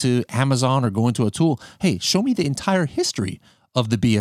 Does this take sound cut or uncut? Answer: uncut